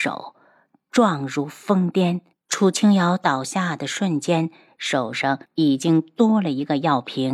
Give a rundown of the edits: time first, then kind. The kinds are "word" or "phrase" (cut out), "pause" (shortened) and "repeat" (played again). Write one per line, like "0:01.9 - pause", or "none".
0:02.3 - pause
0:05.5 - pause

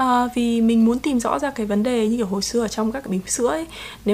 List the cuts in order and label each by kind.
0:03.1 - word

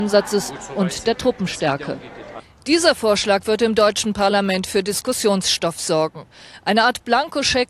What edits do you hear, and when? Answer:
none

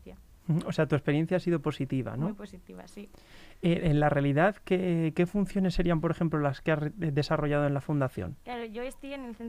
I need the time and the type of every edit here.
none

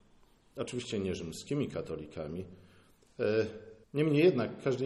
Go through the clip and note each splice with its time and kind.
0:03.8 - pause

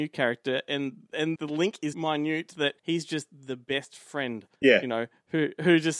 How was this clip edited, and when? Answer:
0:01.4 - word
0:01.9 - word
0:02.8 - pause
0:04.5 - pause

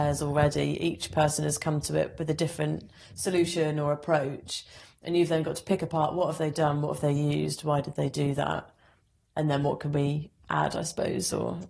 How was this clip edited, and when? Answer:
none

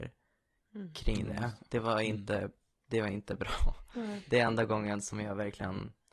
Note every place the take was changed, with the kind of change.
none

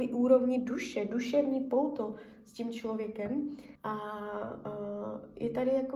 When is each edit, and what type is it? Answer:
0:03.8 - pause

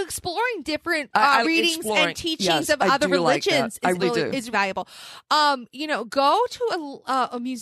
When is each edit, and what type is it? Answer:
0:01.4 - word
0:04.0 - word
0:04.5 - word

